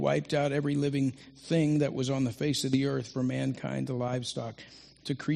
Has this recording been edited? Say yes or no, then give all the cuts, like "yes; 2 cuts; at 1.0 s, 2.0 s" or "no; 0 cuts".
no; 0 cuts